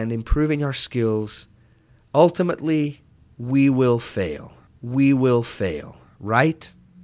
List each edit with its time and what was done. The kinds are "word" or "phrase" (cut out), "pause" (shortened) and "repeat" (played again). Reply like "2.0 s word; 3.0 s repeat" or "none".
4.7 s repeat